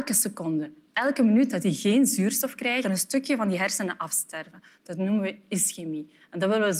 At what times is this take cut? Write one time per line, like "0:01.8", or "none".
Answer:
0:02.8